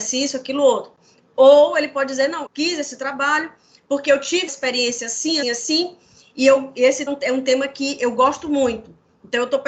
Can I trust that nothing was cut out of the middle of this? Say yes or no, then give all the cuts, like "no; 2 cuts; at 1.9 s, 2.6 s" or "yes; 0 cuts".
no; 4 cuts; at 2.5 s, 4.5 s, 5.4 s, 7.1 s